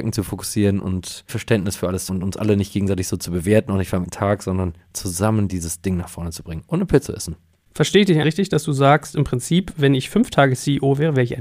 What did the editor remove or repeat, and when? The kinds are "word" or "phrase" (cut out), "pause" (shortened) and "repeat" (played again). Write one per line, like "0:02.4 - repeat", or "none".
0:01.3 - word
0:02.1 - word
0:04.0 - word
0:07.1 - word
0:08.2 - word

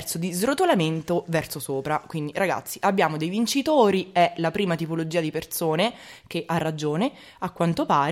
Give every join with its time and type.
none

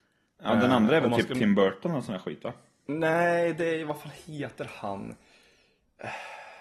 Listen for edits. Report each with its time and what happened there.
none

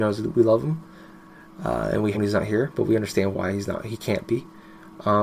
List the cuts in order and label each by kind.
0:02.1 - phrase

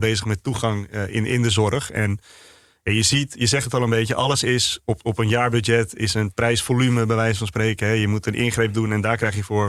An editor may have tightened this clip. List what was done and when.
none

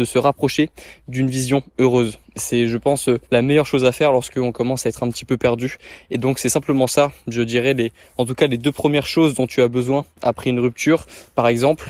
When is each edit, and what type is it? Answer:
0:03.2 - pause

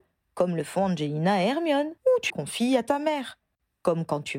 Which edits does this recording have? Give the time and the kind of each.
0:02.0 - pause
0:02.3 - word

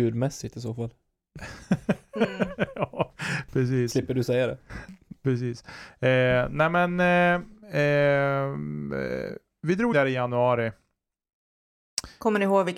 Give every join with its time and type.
0:09.9 - word

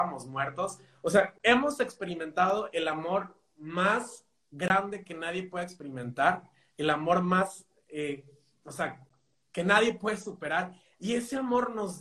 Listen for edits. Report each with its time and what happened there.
none

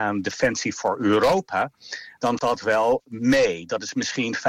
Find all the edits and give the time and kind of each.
0:02.4 - word

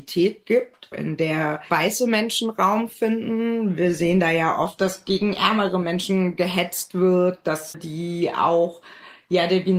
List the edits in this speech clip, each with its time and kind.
0:00.9 - word
0:01.7 - word
0:04.8 - word
0:07.7 - word

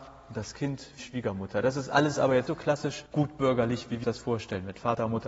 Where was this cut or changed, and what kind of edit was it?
0:01.0 - word
0:02.5 - word
0:03.1 - pause
0:04.0 - word

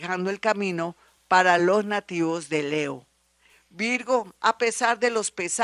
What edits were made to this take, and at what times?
none

